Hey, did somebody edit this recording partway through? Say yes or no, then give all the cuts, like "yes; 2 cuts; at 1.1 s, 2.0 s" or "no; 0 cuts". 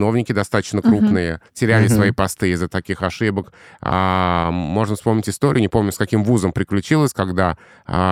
yes; 1 cut; at 1.5 s